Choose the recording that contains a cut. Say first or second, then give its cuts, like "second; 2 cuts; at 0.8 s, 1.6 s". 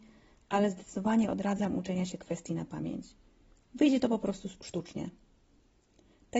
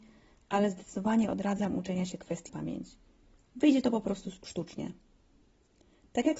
second; 1 cut; at 2.5 s